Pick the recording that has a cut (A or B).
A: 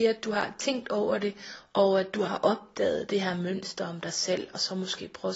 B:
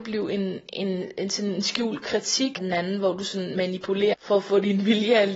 B